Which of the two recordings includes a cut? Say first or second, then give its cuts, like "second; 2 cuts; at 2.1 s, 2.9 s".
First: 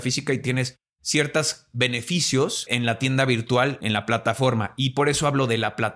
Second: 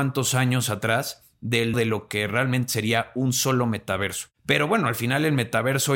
second; 2 cuts; at 1.7 s, 4.3 s